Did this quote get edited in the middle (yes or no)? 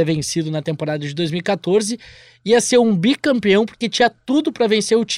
no